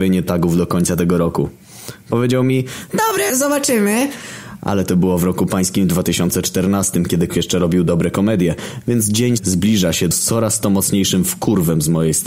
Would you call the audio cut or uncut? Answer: cut